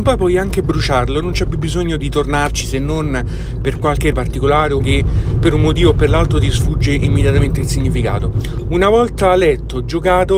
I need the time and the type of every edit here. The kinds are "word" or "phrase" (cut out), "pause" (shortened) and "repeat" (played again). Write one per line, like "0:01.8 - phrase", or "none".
0:02.0 - word
0:04.1 - word
0:04.8 - phrase